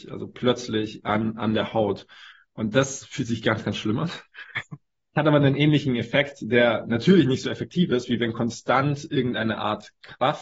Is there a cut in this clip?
no; 0 cuts

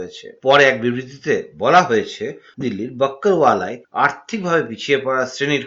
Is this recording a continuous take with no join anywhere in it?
no; 1 cut; at 2.6 s

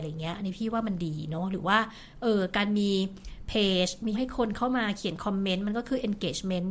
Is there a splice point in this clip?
yes; 1 cut; at 4.1 s

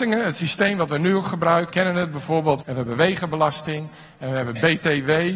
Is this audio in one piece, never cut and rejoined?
no; 2 cuts; at 1.7 s, 2.6 s

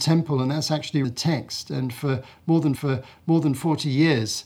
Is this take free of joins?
no; 2 cuts; at 1.0 s, 2.8 s

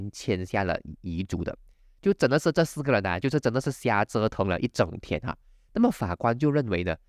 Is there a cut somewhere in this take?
no; 0 cuts

